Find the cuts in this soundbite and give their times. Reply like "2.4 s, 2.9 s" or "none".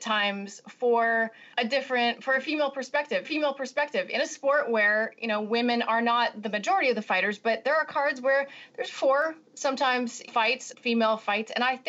1.5 s, 3.2 s, 10.3 s, 10.7 s